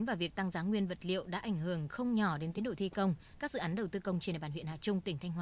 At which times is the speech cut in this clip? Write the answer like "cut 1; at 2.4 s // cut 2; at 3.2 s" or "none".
none